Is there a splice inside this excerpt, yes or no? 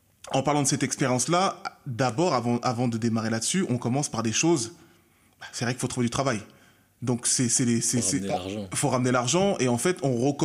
no